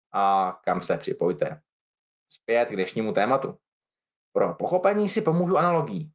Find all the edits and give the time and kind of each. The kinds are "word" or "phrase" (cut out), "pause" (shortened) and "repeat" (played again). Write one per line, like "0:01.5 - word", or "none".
none